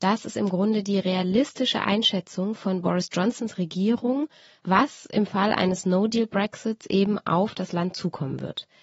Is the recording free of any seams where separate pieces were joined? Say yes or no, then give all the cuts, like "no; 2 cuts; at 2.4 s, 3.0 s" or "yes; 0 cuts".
yes; 0 cuts